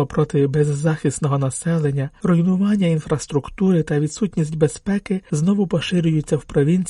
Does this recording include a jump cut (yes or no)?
no